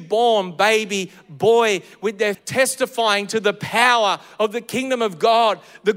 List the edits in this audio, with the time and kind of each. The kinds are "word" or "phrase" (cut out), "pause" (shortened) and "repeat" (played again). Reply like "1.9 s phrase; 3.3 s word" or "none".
2.3 s phrase